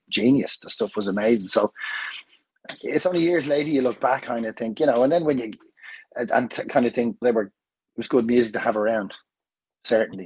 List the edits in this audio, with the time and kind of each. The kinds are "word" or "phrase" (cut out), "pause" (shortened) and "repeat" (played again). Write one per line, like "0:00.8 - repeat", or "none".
0:04.2 - word
0:07.2 - word